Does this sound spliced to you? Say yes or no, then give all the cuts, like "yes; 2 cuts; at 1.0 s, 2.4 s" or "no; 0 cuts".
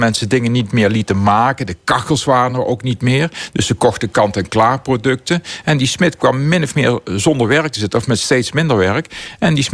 no; 0 cuts